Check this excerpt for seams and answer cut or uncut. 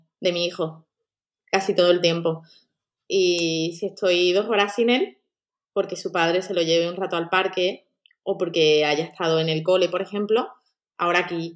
uncut